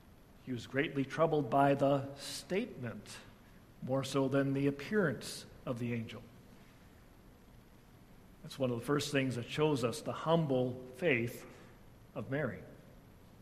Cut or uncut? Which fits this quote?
uncut